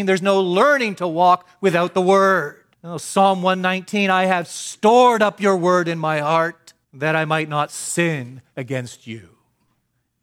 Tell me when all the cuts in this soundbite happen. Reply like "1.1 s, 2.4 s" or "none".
2.7 s, 6.8 s, 8.5 s